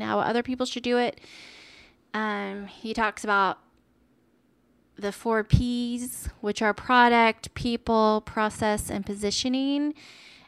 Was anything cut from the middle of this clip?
no; 0 cuts

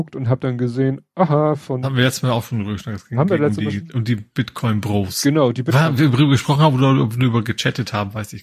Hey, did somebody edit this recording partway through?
no; 0 cuts

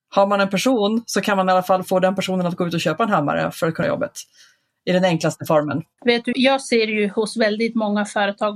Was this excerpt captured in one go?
no; 2 cuts; at 3.8 s, 6.3 s

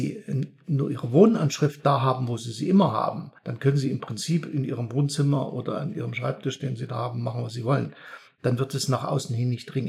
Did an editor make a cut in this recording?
yes; 1 cut; at 3.4 s

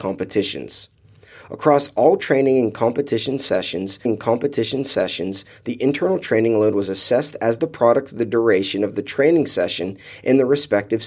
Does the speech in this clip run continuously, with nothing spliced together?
no; 1 cut; at 4.1 s

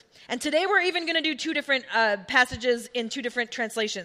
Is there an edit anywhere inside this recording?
no; 0 cuts

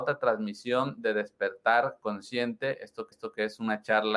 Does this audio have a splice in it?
yes; 1 cut; at 3.1 s

